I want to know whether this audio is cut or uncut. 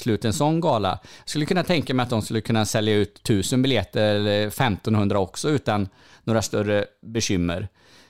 uncut